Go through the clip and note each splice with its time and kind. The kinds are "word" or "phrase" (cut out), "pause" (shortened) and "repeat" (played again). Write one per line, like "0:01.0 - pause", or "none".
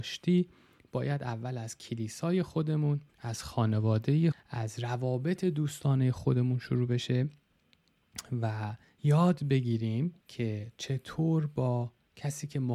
0:03.1 - pause
0:04.3 - word
0:10.2 - pause